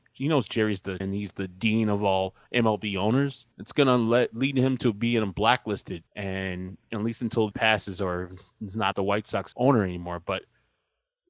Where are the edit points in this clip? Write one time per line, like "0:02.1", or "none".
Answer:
0:01.0
0:02.4
0:03.5
0:06.1
0:07.5
0:08.9
0:09.5